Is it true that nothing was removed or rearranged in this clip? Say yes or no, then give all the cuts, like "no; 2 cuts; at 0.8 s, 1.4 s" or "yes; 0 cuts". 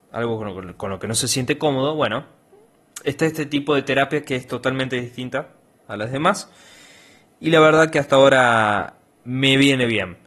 yes; 0 cuts